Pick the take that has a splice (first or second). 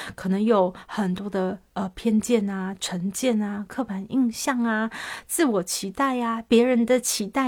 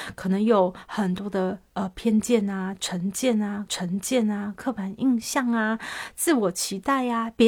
second